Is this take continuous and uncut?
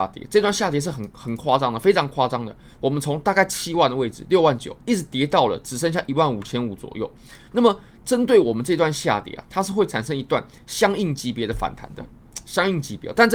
no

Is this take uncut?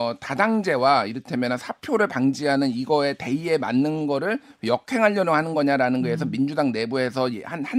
yes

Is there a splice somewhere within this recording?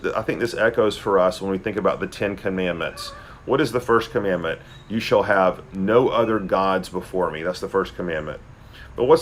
no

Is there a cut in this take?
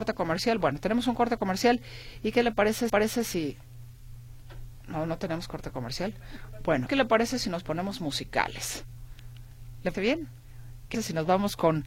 yes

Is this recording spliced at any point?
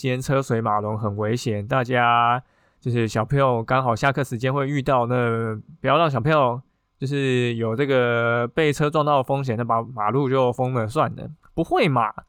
no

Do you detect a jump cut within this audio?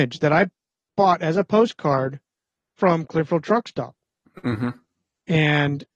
no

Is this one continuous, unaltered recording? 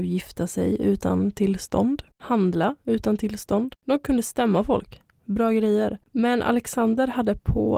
no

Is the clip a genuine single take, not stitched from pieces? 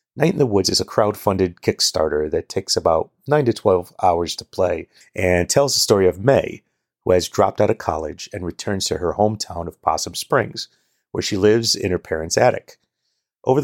yes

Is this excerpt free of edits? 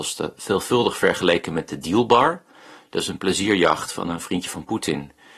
yes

